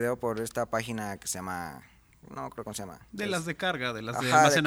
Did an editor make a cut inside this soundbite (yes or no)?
no